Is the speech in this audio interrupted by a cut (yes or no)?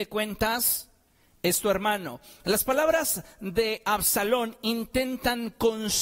no